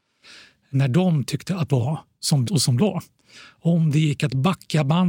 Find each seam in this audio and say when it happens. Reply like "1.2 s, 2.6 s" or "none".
1.7 s, 2.4 s, 2.8 s